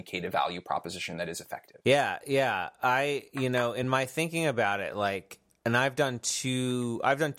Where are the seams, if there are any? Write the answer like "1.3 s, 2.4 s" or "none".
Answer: none